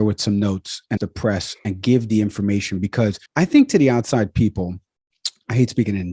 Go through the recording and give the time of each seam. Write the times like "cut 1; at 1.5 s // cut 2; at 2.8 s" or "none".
cut 1; at 1.0 s // cut 2; at 3.3 s